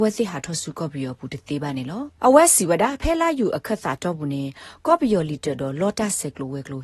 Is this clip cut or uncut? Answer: cut